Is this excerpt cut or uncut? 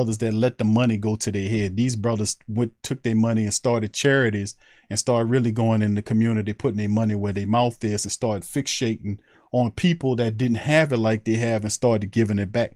uncut